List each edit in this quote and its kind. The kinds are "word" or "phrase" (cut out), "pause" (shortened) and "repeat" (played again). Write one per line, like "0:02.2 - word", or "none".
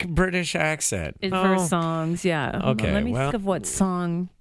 0:01.3 - word
0:03.3 - word